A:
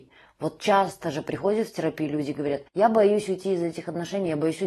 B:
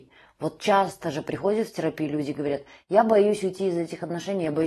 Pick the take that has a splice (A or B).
A